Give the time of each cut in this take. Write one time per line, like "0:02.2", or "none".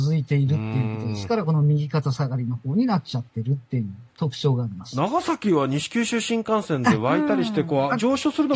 0:04.1